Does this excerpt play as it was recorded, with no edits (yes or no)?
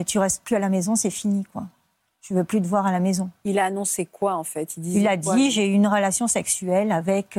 yes